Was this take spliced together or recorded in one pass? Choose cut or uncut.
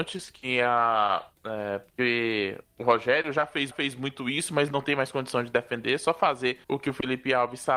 cut